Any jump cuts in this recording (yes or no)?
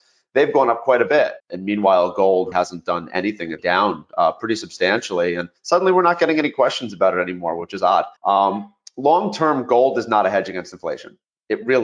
yes